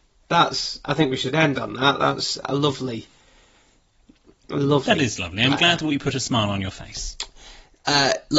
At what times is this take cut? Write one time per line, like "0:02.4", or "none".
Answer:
0:02.4